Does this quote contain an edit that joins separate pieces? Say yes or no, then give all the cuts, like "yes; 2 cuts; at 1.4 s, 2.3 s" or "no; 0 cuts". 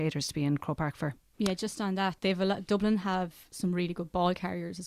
yes; 1 cut; at 2.2 s